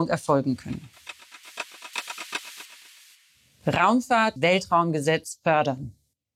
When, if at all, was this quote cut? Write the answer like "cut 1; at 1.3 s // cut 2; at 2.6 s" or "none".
cut 1; at 4.4 s